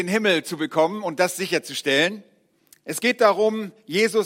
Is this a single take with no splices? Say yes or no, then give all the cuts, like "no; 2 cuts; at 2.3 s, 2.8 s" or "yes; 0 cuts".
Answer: yes; 0 cuts